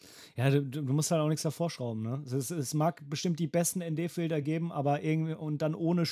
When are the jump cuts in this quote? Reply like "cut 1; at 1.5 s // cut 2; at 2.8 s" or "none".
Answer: none